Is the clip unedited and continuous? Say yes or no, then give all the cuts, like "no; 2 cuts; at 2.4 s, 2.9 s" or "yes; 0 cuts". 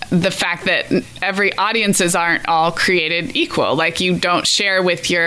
yes; 0 cuts